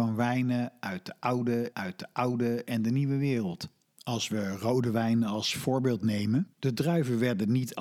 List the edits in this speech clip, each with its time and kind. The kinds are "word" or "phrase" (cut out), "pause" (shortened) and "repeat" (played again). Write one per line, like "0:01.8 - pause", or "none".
0:01.7 - repeat
0:03.8 - pause
0:06.5 - pause